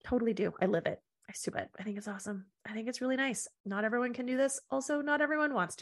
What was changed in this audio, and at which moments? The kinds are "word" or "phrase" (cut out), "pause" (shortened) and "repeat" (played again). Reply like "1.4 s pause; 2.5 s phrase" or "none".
1.5 s word; 3.6 s word